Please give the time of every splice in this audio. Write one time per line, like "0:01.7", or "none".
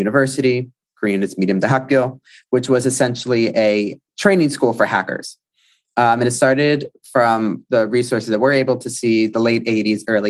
none